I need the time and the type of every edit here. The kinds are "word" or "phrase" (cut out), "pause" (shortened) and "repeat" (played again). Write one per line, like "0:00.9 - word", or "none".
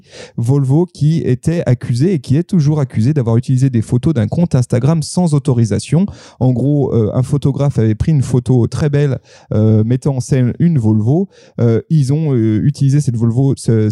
none